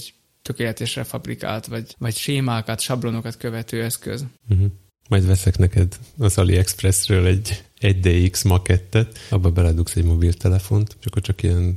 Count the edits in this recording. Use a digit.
0